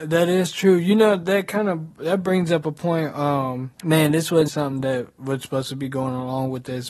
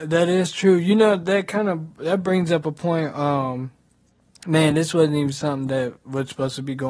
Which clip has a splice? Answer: first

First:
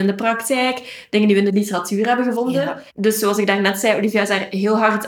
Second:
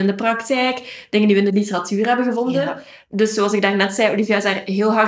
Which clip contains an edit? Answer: first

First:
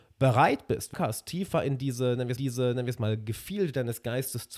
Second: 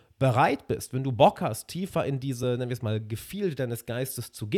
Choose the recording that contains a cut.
first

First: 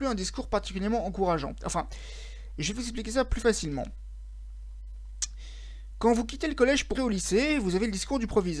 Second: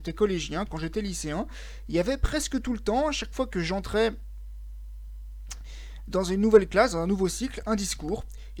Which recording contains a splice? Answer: first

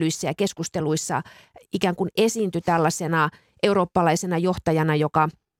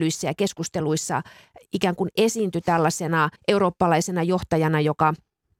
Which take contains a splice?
second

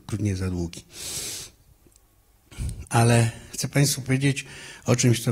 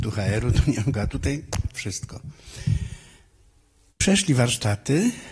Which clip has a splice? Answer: second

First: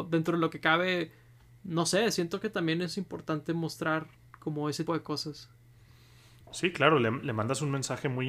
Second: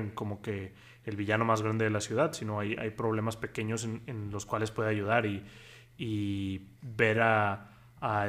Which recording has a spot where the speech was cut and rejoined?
first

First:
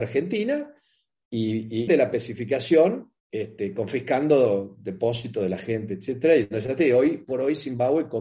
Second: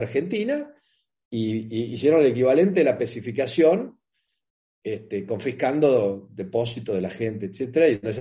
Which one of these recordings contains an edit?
first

